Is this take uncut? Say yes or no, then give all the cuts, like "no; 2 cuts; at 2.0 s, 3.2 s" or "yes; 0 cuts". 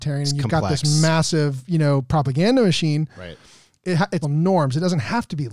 no; 1 cut; at 4.2 s